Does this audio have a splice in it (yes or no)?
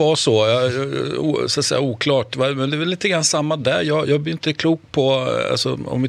no